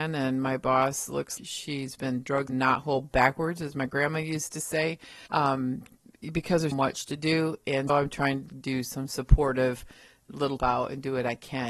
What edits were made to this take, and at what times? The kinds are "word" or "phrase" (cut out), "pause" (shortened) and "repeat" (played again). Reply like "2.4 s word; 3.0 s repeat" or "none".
1.4 s word; 2.5 s phrase; 5.3 s pause; 6.7 s word; 7.9 s word; 10.6 s phrase

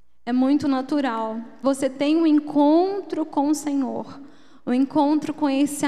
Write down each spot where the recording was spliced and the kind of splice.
1.6 s word

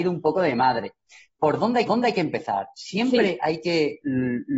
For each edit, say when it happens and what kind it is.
1.9 s repeat

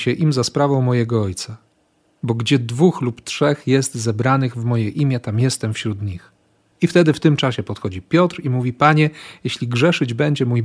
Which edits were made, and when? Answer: none

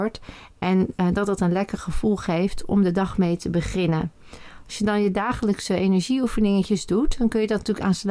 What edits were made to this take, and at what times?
none

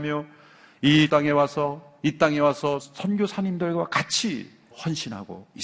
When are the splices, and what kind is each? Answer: 1.1 s word; 2.8 s word; 4.7 s word

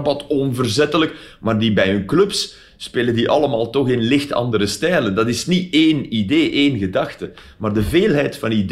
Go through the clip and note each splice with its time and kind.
none

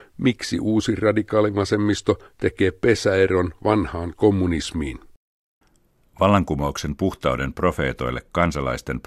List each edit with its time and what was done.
none

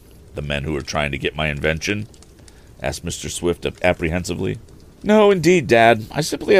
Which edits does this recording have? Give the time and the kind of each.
none

